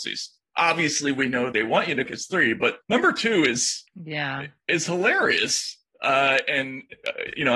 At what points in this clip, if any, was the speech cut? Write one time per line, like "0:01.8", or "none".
0:01.5
0:02.1
0:02.8
0:03.9